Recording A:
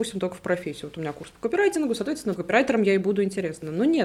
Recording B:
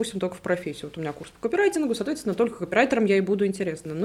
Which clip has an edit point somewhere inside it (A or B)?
A